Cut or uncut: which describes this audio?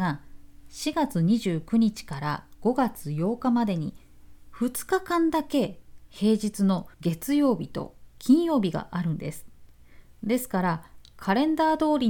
cut